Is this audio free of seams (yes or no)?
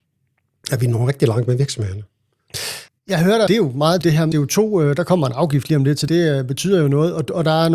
no